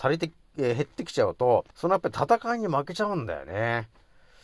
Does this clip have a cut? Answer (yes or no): yes